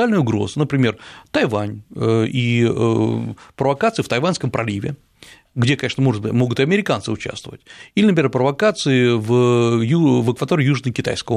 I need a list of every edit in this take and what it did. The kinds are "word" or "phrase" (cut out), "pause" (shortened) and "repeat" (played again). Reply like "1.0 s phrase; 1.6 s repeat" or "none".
none